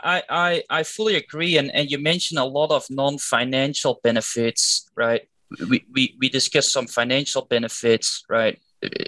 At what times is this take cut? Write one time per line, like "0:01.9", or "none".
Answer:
none